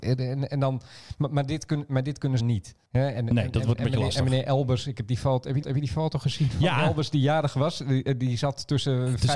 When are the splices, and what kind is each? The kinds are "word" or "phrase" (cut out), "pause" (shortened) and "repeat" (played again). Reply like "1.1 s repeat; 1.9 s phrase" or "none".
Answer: 2.4 s phrase; 5.6 s repeat